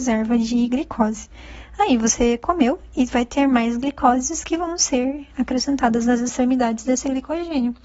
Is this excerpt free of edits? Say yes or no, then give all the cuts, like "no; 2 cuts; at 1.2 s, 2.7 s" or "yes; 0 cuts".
yes; 0 cuts